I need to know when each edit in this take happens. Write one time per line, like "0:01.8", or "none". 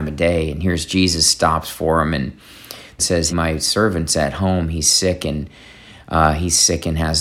0:03.0
0:03.3

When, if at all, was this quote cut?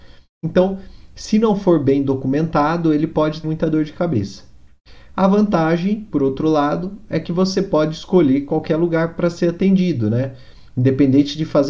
0:03.4

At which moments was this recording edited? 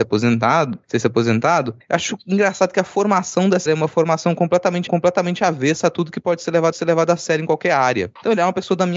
0:03.7
0:04.9
0:06.7

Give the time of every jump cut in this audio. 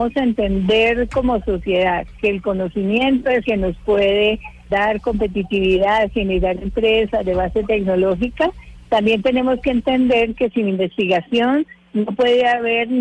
0:03.4
0:04.7

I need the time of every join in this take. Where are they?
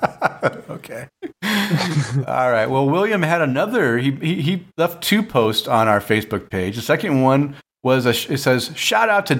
none

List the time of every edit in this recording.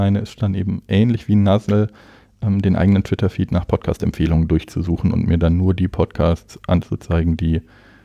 none

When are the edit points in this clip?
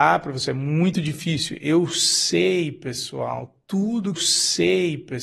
0:04.2

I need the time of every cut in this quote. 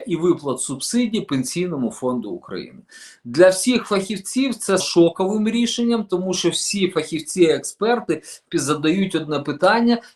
0:04.8
0:08.5

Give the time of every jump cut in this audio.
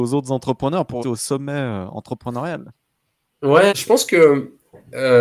0:01.0
0:03.7

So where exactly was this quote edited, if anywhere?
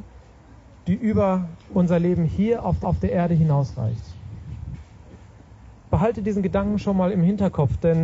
0:01.6
0:02.8

